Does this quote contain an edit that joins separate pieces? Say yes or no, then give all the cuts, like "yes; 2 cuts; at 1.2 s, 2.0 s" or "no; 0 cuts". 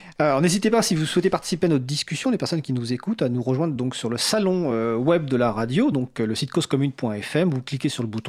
no; 0 cuts